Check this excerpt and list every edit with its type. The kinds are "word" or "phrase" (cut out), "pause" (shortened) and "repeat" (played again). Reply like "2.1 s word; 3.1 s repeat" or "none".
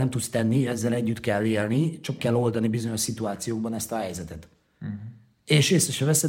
2.2 s word